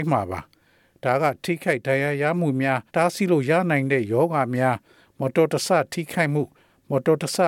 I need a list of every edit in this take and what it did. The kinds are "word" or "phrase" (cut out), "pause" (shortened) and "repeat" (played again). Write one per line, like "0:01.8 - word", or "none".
0:02.9 - pause

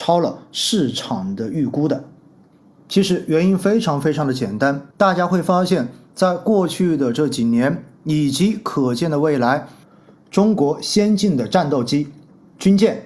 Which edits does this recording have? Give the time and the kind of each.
0:04.9 - pause

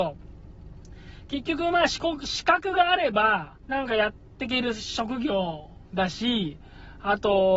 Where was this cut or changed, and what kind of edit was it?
0:03.6 - pause

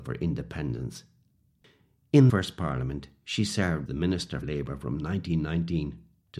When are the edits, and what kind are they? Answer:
0:02.3 - word
0:03.9 - word
0:04.4 - word

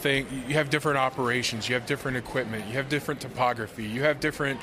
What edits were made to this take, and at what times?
none

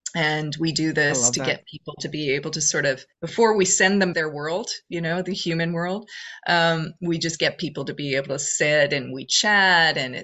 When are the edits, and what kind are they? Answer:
0:04.1 - phrase

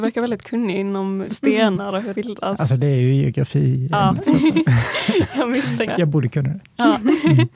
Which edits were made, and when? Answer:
0:01.3 - word
0:02.1 - word
0:05.9 - word

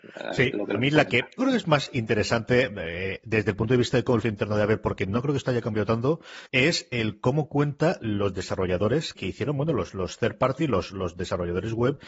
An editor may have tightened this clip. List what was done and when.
0:01.4 - word
0:04.2 - word
0:06.5 - pause
0:09.2 - word

